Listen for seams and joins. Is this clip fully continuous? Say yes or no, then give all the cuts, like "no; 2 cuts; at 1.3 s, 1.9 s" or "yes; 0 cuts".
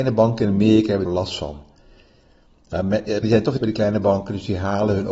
no; 3 cuts; at 1.1 s, 3.2 s, 3.6 s